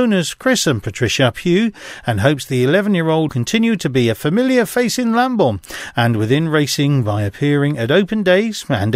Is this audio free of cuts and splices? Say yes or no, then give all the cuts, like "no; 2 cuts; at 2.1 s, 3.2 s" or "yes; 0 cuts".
no; 1 cut; at 3.3 s